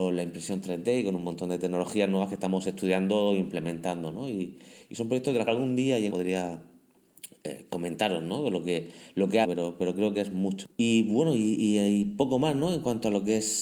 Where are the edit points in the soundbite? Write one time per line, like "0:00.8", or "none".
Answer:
0:05.5
0:06.1
0:09.4
0:10.7